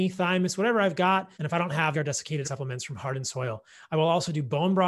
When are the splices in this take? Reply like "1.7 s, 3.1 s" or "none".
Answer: 1.3 s, 1.9 s, 2.4 s